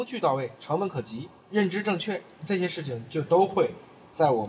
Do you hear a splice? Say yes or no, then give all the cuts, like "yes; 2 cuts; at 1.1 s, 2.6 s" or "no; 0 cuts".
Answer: yes; 1 cut; at 1.4 s